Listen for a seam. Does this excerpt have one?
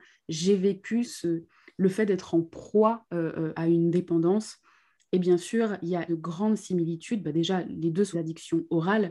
yes; 4 cuts; at 1.0 s, 3.6 s, 6.1 s, 8.1 s

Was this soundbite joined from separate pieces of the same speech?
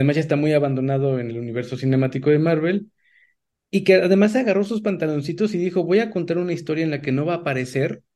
no; 0 cuts

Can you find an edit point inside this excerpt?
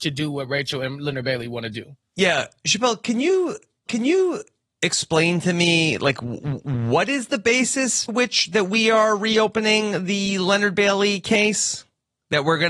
yes; 2 cuts; at 3.9 s, 8.1 s

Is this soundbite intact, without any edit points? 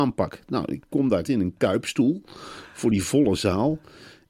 no; 1 cut; at 1.3 s

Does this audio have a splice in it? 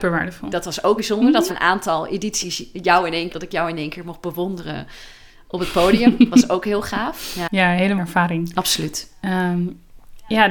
yes; 4 cuts; at 1.0 s, 1.5 s, 3.3 s, 8.0 s

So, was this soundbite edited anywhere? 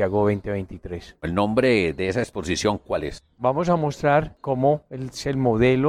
no; 0 cuts

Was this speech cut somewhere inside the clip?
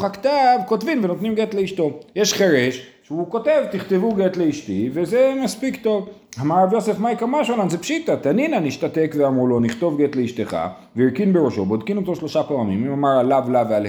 no; 0 cuts

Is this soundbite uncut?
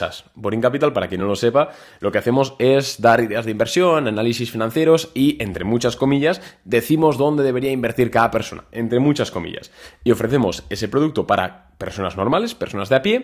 yes; 0 cuts

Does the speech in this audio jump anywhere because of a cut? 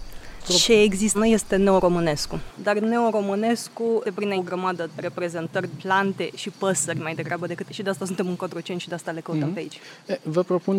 yes; 6 cuts; at 1.1 s, 4.0 s, 4.4 s, 4.9 s, 5.8 s, 7.7 s

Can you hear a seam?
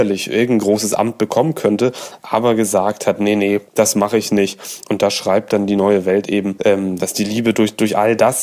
yes; 1 cut; at 3.7 s

